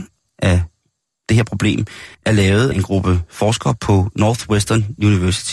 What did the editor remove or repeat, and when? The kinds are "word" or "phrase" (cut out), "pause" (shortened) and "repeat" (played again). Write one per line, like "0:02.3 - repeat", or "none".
0:02.1 - pause
0:02.7 - word